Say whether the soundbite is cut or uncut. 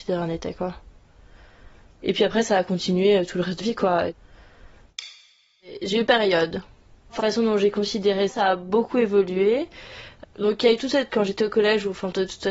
cut